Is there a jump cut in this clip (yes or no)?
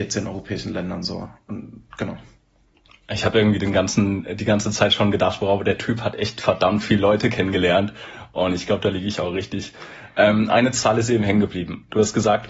no